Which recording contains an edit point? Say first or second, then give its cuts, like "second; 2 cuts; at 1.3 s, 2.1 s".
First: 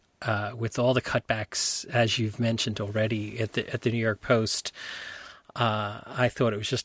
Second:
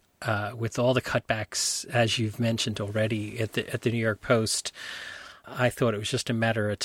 second; 1 cut; at 5.4 s